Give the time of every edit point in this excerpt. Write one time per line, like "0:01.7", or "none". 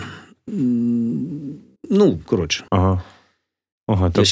0:01.8
0:02.7

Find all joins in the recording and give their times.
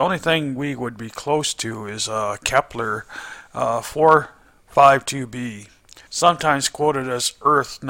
0:06.1

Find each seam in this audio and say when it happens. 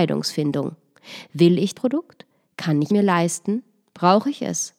0:01.7
0:02.9

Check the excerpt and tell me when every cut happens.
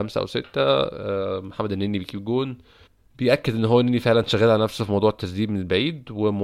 0:02.9

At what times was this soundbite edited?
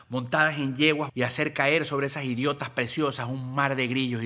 0:01.1

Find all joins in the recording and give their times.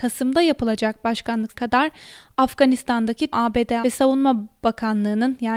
0:01.5
0:03.3
0:03.8

